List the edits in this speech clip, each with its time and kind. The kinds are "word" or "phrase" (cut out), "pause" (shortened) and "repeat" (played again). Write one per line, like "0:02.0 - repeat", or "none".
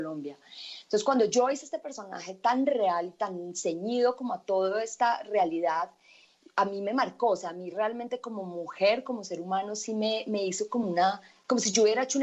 none

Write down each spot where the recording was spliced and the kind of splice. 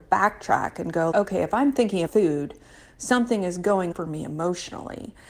0:01.1 - word
0:02.1 - word
0:03.9 - word

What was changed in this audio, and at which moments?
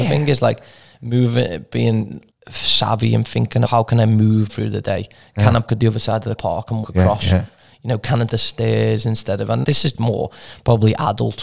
0:02.3 - word
0:03.6 - word
0:04.5 - word
0:05.7 - word
0:06.4 - word
0:06.8 - word
0:08.3 - word
0:09.6 - word
0:09.9 - word

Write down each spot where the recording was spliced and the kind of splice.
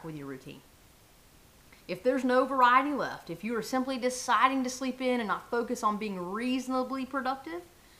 0:01.8 - pause

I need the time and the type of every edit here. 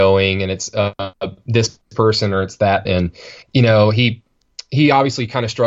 0:02.9 - word
0:03.4 - pause

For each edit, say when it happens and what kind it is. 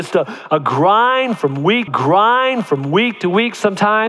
0:01.9 - repeat

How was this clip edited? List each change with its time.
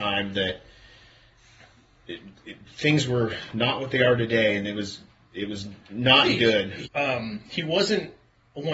0:06.9 - word

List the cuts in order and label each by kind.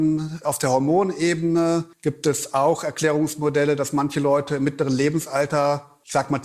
0:01.9 - pause

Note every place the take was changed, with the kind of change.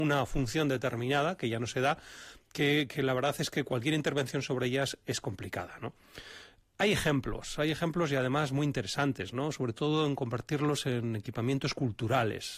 none

